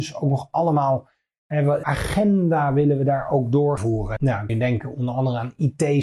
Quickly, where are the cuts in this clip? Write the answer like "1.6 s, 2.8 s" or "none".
1.8 s, 3.8 s, 4.2 s, 4.5 s